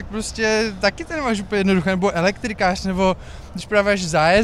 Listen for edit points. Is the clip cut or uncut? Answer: uncut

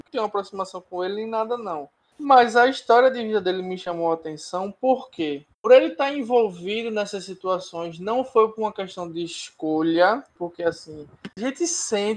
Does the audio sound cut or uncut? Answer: cut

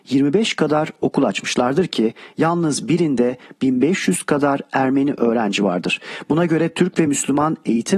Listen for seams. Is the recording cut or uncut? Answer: uncut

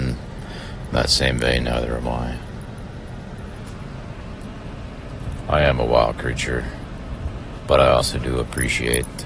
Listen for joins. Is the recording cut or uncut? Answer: uncut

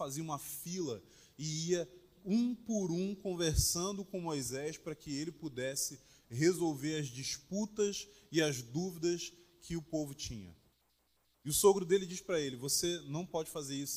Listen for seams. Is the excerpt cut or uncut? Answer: uncut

